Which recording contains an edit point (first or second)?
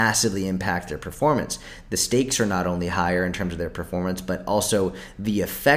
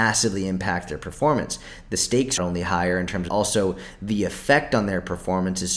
second